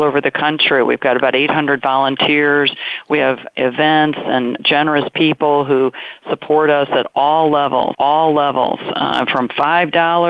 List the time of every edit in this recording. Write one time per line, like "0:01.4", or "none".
0:04.6
0:07.9

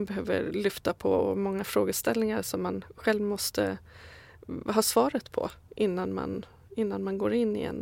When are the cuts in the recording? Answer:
none

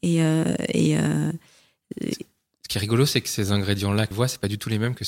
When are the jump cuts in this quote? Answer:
0:04.1

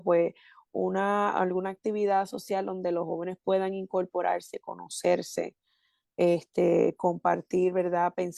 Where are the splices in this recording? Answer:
none

